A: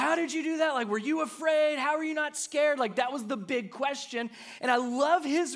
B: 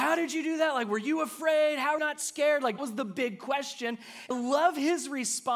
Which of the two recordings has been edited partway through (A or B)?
B